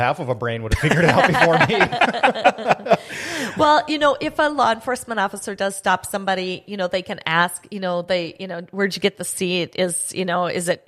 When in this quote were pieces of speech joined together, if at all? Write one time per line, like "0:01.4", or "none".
none